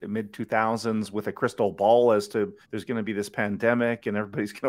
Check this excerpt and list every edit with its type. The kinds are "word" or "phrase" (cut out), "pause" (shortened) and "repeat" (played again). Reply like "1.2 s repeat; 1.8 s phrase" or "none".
2.6 s pause